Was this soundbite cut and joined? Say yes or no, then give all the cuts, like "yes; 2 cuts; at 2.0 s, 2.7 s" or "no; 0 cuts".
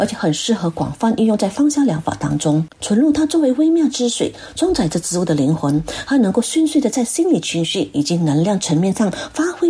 yes; 1 cut; at 2.7 s